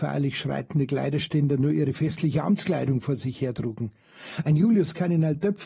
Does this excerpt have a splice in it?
no; 0 cuts

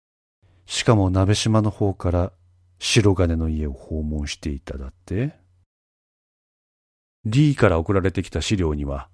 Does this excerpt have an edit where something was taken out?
no; 0 cuts

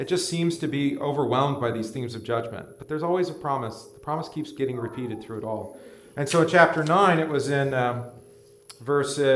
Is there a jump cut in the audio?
no; 0 cuts

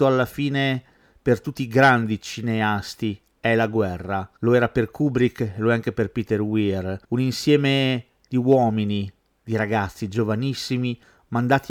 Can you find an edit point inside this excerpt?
no; 0 cuts

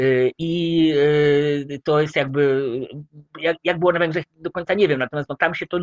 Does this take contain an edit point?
yes; 1 cut; at 3.3 s

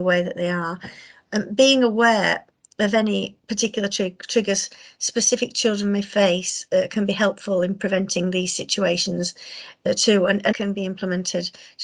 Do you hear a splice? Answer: yes; 2 cuts; at 3.4 s, 10.5 s

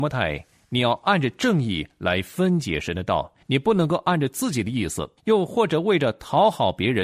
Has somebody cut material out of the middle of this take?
yes; 2 cuts; at 3.4 s, 5.2 s

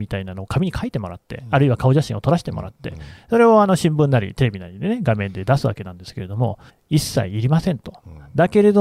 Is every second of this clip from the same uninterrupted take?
no; 1 cut; at 6.7 s

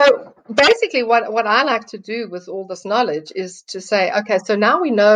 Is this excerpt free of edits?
yes; 0 cuts

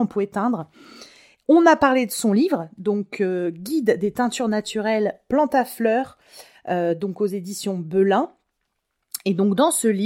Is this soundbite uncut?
yes; 0 cuts

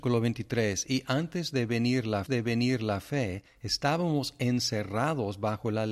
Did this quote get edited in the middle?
yes; 1 cut; at 2.3 s

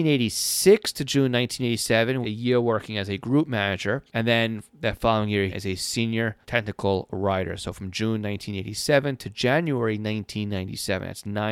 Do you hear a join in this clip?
yes; 4 cuts; at 2.2 s, 4.1 s, 5.5 s, 6.4 s

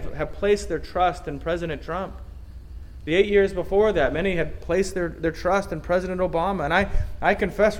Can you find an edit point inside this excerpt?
no; 0 cuts

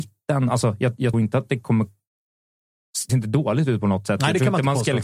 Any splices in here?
yes; 2 cuts; at 1.1 s, 3.1 s

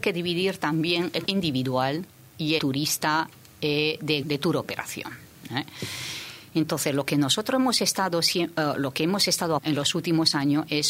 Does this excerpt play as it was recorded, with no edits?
no; 4 cuts; at 1.3 s, 2.6 s, 4.2 s, 9.6 s

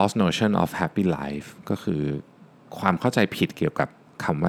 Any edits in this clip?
no; 0 cuts

